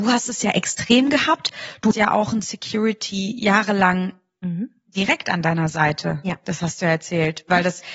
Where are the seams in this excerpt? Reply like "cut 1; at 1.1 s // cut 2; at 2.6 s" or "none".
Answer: cut 1; at 1.9 s